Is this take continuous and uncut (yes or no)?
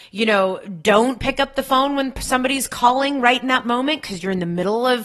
yes